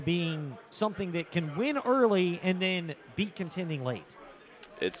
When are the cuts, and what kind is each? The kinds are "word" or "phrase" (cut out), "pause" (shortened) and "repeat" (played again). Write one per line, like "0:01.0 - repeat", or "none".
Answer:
none